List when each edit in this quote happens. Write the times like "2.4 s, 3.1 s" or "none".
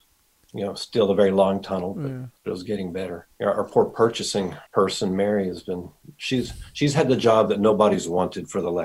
2.4 s, 3.3 s, 4.7 s